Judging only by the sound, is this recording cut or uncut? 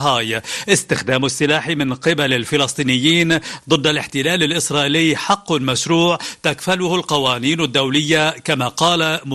uncut